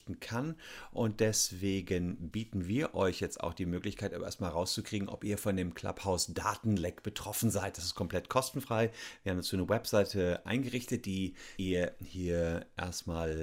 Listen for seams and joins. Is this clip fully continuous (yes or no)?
no